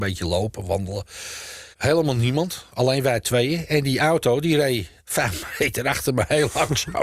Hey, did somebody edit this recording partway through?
yes; 2 cuts; at 1.7 s, 5.0 s

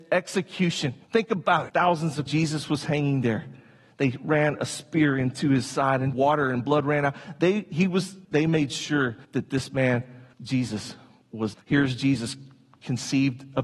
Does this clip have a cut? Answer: yes; 8 cuts; at 1.0 s, 1.7 s, 2.3 s, 6.1 s, 8.2 s, 9.2 s, 10.3 s, 11.5 s

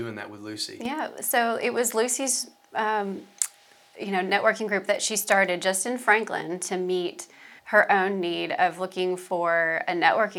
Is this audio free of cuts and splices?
no; 1 cut; at 7.6 s

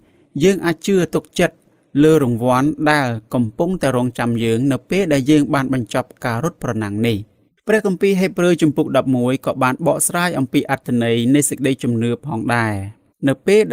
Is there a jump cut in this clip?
no; 0 cuts

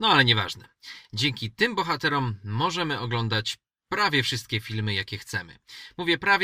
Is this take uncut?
yes; 0 cuts

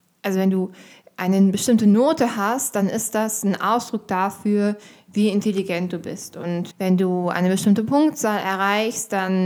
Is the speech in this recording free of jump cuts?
no; 1 cut; at 6.7 s

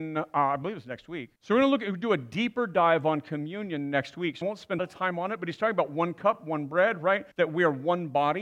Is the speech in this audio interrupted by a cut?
yes; 4 cuts; at 1.4 s, 4.4 s, 4.8 s, 7.3 s

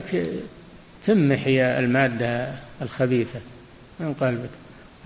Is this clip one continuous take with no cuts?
yes; 0 cuts

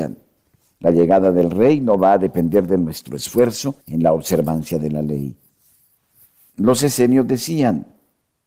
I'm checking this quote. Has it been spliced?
yes; 1 cut; at 3.8 s

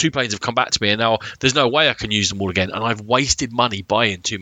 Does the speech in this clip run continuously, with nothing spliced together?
yes; 0 cuts

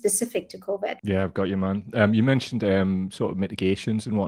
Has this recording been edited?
yes; 1 cut; at 1.0 s

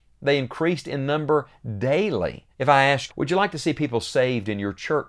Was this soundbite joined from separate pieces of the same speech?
yes; 2 cuts; at 2.5 s, 3.1 s

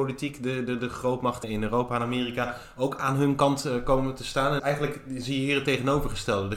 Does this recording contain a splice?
yes; 2 cuts; at 1.4 s, 4.6 s

